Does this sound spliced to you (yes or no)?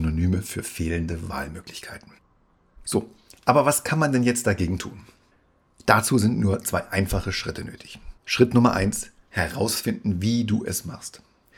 yes